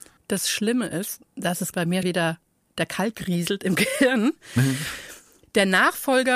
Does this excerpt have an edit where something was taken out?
yes; 2 cuts; at 1.7 s, 2.0 s

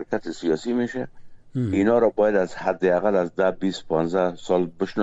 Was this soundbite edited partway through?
no; 0 cuts

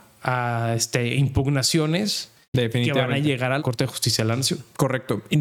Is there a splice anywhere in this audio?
yes; 1 cut; at 3.6 s

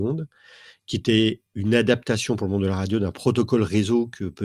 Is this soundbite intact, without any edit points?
no; 1 cut; at 1.5 s

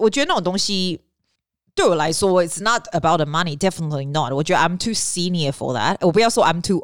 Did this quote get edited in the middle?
yes; 1 cut; at 1.4 s

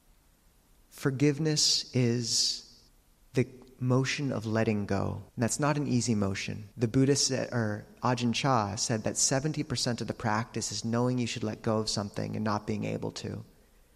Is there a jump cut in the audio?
yes; 3 cuts; at 2.9 s, 5.3 s, 6.7 s

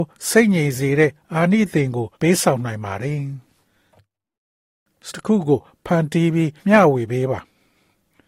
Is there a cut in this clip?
yes; 3 cuts; at 2.1 s, 5.1 s, 6.6 s

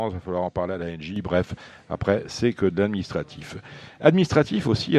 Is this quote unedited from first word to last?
yes; 0 cuts

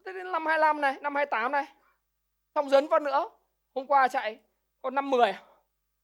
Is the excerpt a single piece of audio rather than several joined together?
yes; 0 cuts

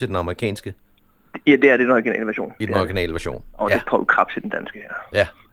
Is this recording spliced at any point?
no; 0 cuts

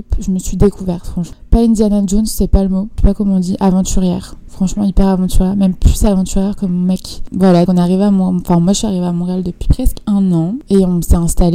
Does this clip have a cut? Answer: yes; 1 cut; at 7.7 s

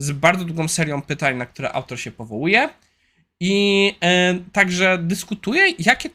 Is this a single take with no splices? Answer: yes; 0 cuts

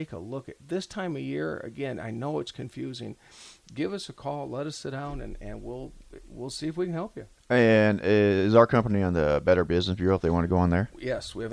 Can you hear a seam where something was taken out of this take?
yes; 1 cut; at 7.4 s

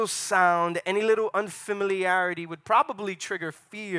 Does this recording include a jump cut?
no; 0 cuts

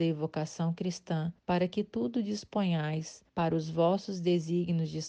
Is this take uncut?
no; 2 cuts; at 1.4 s, 3.3 s

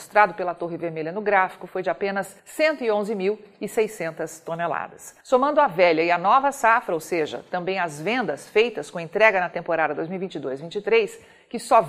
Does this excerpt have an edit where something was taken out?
yes; 2 cuts; at 2.4 s, 5.2 s

